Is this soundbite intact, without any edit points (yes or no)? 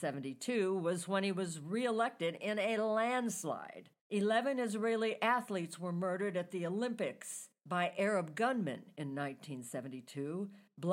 no